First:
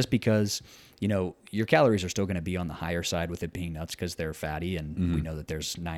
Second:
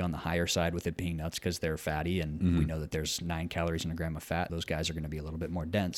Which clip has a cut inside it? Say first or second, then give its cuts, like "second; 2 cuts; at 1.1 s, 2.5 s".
second; 1 cut; at 4.5 s